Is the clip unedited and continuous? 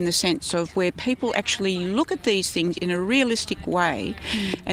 yes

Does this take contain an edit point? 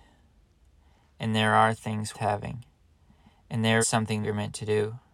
yes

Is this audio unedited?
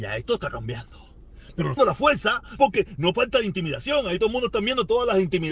no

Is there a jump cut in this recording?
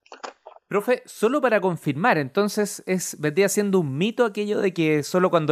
no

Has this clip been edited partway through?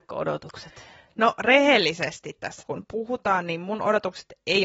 yes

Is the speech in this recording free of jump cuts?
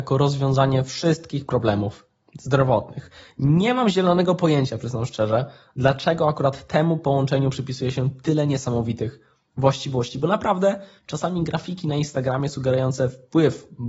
yes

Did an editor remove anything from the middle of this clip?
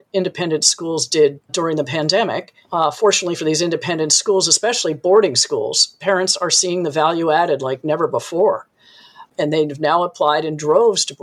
yes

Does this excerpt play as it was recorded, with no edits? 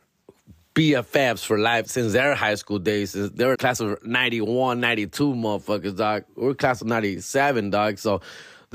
no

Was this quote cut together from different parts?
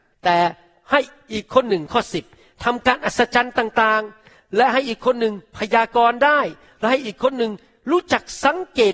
no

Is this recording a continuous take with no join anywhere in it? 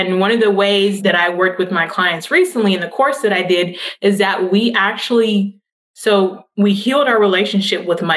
yes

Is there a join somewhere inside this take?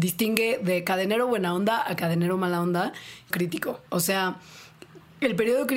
yes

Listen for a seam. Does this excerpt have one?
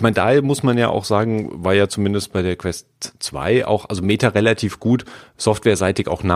no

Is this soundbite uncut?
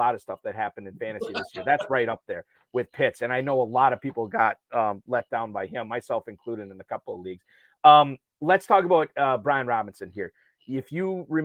yes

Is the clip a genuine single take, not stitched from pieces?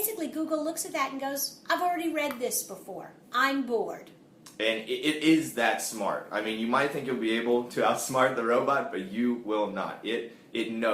yes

